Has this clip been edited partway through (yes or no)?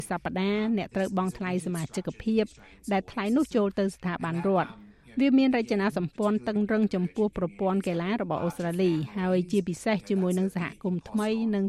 no